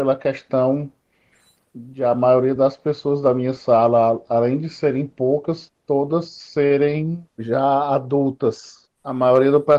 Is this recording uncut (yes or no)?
yes